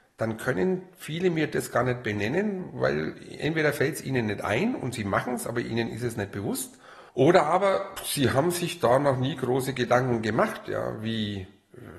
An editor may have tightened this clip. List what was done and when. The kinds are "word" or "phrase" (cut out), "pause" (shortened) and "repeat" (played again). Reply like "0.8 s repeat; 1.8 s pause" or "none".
7.1 s pause